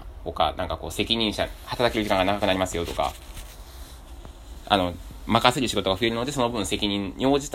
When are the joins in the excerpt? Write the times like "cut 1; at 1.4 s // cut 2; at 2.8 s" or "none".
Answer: none